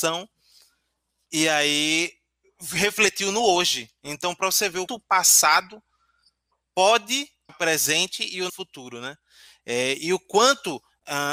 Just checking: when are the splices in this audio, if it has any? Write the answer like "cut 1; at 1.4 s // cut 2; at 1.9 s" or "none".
cut 1; at 4.9 s // cut 2; at 7.5 s // cut 3; at 8.5 s